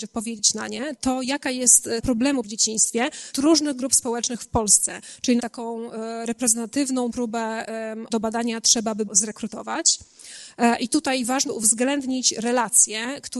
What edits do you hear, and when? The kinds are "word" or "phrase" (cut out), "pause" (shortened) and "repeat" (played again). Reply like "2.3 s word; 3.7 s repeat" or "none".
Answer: 1.0 s word; 2.0 s word; 2.4 s word; 3.3 s word; 5.4 s word; 7.1 s word; 8.1 s word; 9.1 s word; 11.5 s word